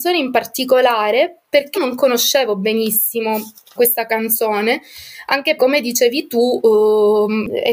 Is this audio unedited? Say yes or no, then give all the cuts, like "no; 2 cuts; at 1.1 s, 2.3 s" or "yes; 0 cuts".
no; 3 cuts; at 1.7 s, 3.8 s, 5.6 s